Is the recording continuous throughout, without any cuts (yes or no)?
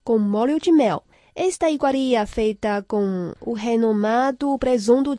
yes